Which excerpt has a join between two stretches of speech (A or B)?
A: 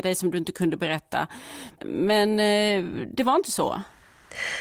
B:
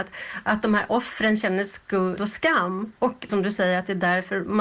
B